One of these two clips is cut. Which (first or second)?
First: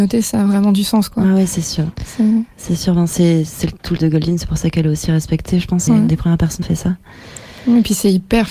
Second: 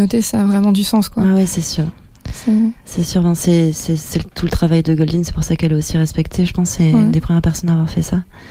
first